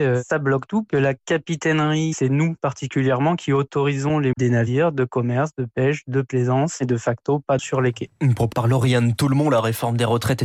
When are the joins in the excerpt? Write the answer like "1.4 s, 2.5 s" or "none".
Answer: 4.3 s, 7.6 s, 8.5 s